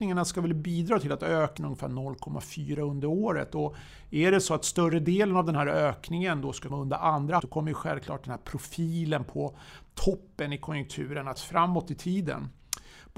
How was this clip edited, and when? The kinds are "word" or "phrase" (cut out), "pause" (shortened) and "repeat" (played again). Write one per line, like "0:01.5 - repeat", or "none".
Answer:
0:01.6 - word
0:06.7 - word
0:07.4 - word
0:11.4 - word